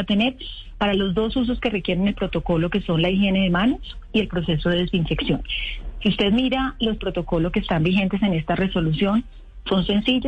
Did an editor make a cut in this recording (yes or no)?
yes